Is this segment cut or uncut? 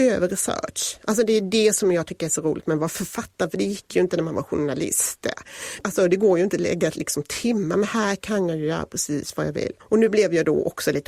cut